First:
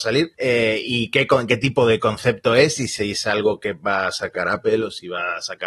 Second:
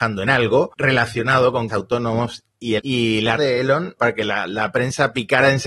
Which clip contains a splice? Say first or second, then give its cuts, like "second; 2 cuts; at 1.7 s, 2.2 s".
second; 4 cuts; at 1.7 s, 2.8 s, 3.4 s, 4.0 s